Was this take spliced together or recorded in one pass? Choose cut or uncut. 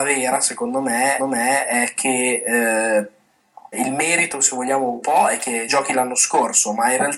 cut